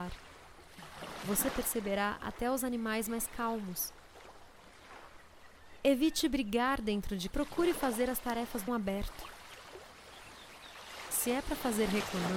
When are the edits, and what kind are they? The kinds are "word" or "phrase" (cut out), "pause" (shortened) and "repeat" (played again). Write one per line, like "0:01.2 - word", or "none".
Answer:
0:07.3 - phrase
0:08.7 - phrase